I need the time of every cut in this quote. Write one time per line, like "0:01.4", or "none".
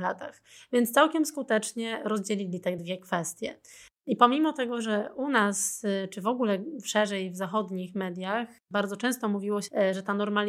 none